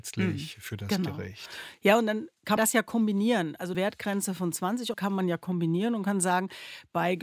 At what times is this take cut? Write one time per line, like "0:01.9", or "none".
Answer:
0:02.6
0:03.7
0:04.9